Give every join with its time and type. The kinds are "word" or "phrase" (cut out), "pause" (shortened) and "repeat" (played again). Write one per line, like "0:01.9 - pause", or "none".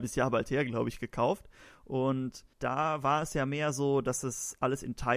0:02.5 - pause

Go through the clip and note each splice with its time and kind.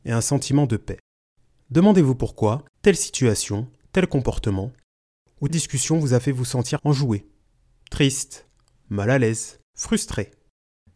0:02.7 - pause
0:05.5 - word
0:06.8 - word
0:09.7 - pause

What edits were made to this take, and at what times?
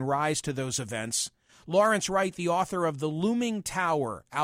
none

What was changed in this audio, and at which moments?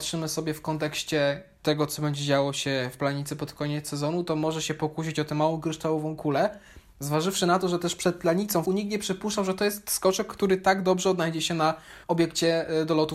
0:08.6 - phrase
0:12.0 - pause

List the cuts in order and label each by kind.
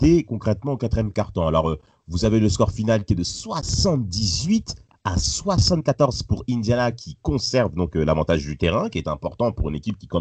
none

